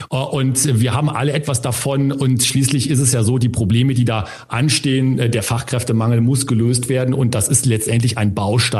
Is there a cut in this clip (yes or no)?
no